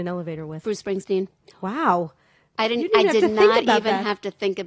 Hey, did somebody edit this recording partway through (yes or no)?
no